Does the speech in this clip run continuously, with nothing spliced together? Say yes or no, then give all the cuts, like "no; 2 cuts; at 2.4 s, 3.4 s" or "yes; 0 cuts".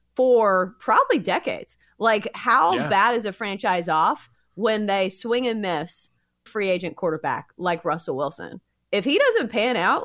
no; 1 cut; at 6.5 s